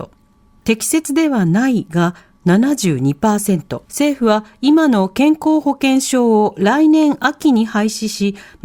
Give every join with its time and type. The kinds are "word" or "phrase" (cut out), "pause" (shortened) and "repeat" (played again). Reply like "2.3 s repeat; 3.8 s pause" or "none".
3.9 s pause